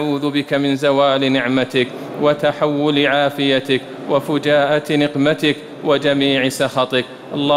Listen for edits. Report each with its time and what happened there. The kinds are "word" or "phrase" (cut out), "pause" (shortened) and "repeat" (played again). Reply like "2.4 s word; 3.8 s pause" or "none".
none